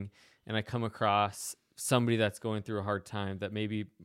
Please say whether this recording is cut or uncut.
uncut